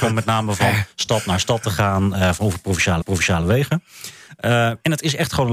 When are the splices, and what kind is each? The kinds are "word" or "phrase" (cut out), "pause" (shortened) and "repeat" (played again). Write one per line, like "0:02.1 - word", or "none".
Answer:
0:03.0 - repeat